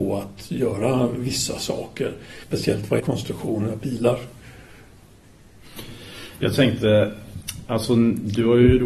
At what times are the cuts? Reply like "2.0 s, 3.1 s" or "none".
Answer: 2.4 s, 3.0 s